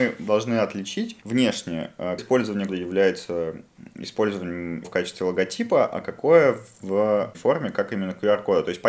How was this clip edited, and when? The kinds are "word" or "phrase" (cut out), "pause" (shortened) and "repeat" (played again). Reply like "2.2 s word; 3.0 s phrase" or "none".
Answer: 2.2 s word; 2.7 s word; 4.8 s word; 7.3 s word